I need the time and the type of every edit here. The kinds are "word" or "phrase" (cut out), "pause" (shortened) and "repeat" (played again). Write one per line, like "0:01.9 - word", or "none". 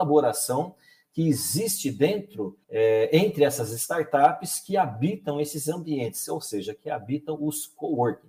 0:02.6 - pause